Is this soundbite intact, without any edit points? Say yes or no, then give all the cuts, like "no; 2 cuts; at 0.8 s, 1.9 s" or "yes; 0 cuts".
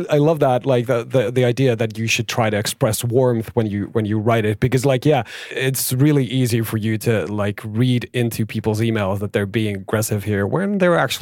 yes; 0 cuts